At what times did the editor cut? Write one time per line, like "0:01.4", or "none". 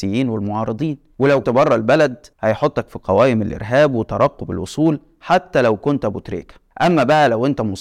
0:01.4
0:02.3